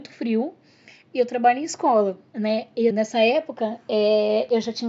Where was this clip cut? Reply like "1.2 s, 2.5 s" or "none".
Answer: 2.3 s, 2.9 s

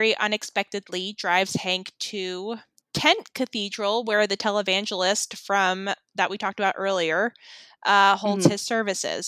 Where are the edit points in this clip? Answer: 2.8 s

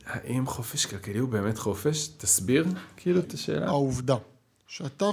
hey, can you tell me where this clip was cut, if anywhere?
3.2 s

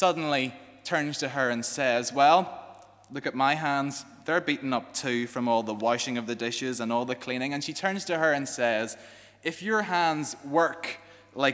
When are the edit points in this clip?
none

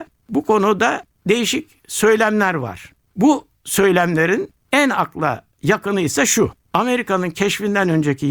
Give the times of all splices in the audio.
none

